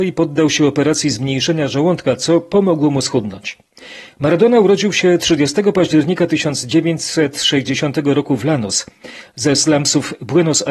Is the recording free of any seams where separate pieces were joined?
yes; 0 cuts

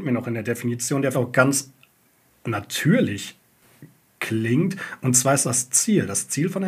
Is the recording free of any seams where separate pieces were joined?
no; 2 cuts; at 1.1 s, 5.4 s

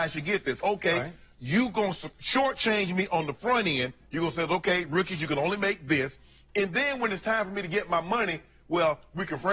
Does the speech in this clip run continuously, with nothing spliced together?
yes; 0 cuts

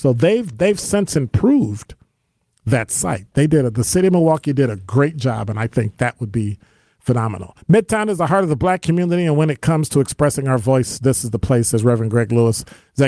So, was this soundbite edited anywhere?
no; 0 cuts

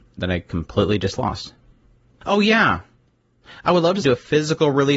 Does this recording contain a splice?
yes; 1 cut; at 4.0 s

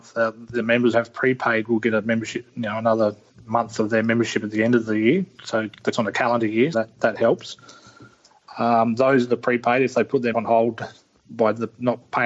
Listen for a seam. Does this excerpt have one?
yes; 4 cuts; at 0.9 s, 5.9 s, 6.7 s, 10.3 s

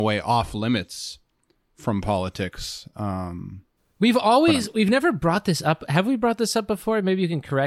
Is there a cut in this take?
no; 0 cuts

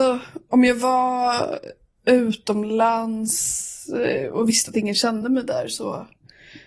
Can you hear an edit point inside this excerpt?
no; 0 cuts

